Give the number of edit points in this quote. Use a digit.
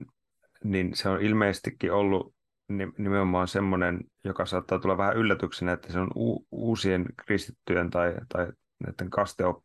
1